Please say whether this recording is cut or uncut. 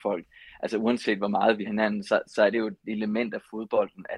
cut